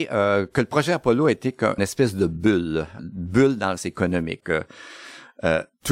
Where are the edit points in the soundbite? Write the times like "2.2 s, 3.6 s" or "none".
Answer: 1.8 s, 3.0 s, 3.8 s, 4.4 s